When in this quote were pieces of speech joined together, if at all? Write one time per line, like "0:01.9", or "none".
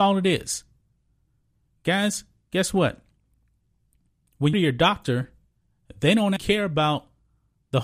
0:04.5
0:06.4